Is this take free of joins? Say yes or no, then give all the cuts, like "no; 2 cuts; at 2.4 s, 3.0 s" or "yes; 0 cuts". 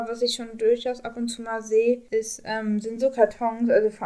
yes; 0 cuts